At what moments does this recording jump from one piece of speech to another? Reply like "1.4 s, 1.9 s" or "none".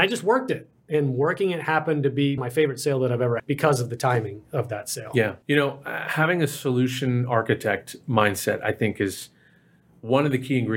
2.4 s, 3.4 s, 5.4 s